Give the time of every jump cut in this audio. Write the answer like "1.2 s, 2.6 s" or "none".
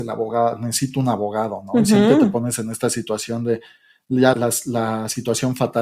4.3 s